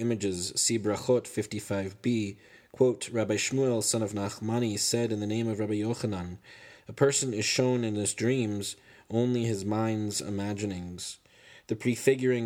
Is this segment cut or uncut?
uncut